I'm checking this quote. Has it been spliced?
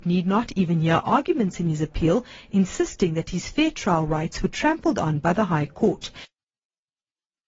no; 0 cuts

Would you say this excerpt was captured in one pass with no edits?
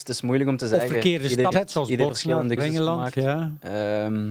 no; 3 cuts; at 1.5 s, 2.1 s, 2.6 s

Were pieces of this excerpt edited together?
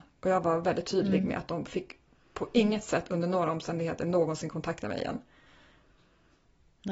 no; 0 cuts

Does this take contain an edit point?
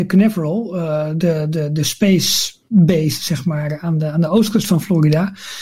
no; 0 cuts

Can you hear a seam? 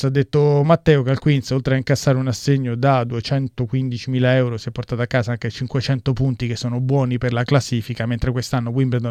no; 0 cuts

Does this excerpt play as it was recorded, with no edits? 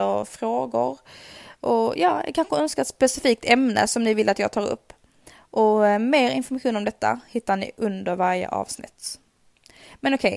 yes; 0 cuts

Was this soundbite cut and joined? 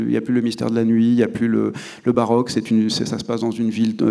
no; 0 cuts

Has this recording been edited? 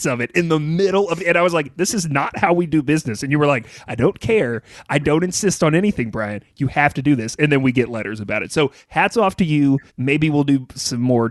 yes; 1 cut; at 9.9 s

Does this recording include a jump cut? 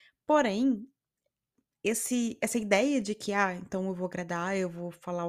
no; 0 cuts

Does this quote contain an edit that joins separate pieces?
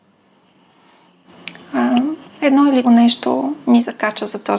yes; 2 cuts; at 2.3 s, 2.8 s

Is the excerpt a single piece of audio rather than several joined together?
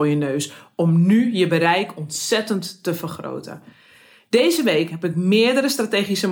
yes; 0 cuts

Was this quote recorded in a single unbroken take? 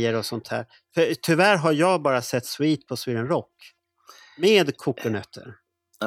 yes; 0 cuts

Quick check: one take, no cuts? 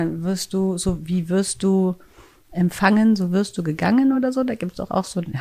yes; 0 cuts

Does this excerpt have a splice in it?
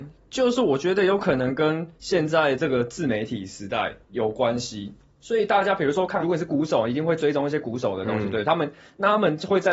yes; 3 cuts; at 1.9 s, 4.0 s, 6.2 s

